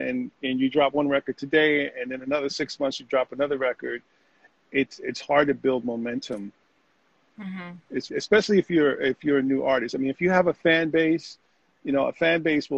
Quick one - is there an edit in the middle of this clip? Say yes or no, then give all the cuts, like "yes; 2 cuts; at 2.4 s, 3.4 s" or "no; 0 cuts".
yes; 1 cut; at 8.1 s